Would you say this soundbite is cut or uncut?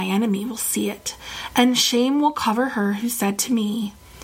uncut